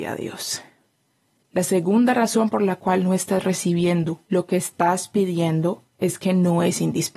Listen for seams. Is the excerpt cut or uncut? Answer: cut